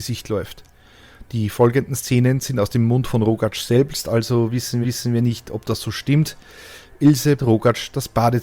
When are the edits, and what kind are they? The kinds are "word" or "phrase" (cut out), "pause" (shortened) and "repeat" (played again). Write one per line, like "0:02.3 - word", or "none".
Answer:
0:04.8 - repeat
0:07.4 - word